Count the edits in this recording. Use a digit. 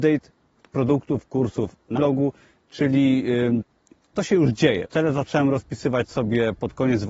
3